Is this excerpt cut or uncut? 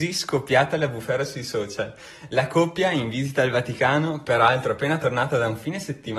uncut